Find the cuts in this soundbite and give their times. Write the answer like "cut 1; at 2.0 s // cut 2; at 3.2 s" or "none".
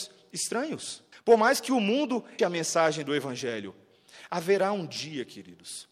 cut 1; at 1.1 s // cut 2; at 2.4 s